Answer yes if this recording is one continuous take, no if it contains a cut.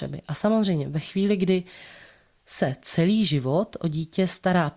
yes